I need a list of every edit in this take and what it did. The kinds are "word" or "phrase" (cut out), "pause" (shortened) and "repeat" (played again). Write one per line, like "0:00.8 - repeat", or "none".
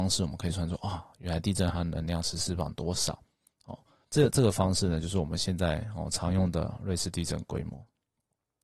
none